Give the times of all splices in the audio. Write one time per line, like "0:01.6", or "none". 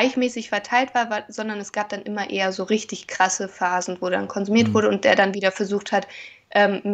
none